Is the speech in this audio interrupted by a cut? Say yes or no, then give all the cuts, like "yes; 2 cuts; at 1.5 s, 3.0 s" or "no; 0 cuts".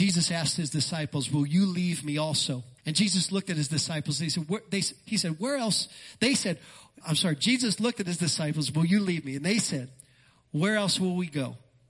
yes; 2 cuts; at 2.8 s, 7.0 s